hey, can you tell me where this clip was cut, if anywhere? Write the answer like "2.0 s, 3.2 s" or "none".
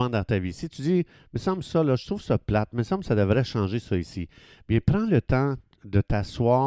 none